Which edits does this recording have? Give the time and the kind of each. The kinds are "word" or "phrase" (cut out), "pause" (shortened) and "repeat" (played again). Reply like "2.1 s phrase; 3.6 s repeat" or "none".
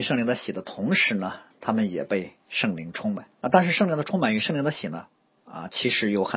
3.3 s pause